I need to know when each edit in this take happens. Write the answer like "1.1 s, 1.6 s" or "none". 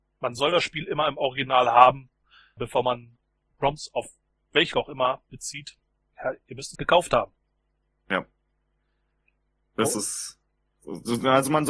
2.6 s, 4.7 s, 6.0 s, 6.8 s

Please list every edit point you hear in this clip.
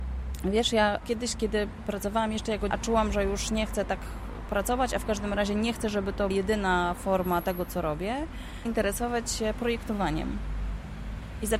2.7 s, 6.3 s, 8.7 s

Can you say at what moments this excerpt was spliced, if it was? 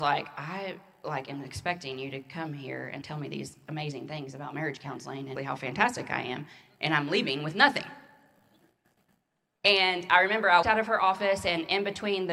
3.0 s, 5.4 s, 10.6 s

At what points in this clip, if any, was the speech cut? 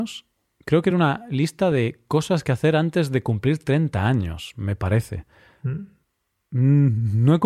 none

